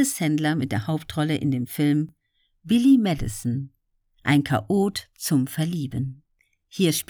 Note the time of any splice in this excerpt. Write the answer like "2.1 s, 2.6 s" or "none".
none